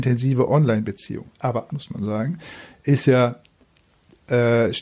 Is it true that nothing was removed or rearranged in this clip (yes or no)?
no